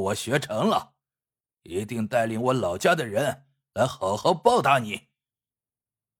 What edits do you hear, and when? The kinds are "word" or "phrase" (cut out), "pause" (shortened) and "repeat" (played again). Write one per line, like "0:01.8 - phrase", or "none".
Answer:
none